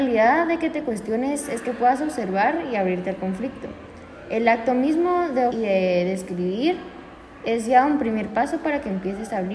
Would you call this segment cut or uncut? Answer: cut